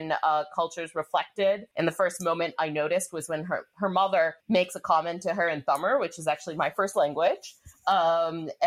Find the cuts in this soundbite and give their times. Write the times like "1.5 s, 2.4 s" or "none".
1.7 s, 4.4 s